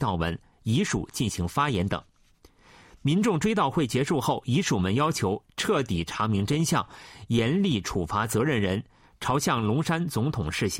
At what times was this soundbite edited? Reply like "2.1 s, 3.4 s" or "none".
none